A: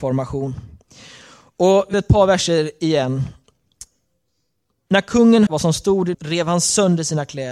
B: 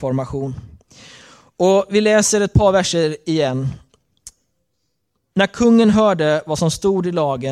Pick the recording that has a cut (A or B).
A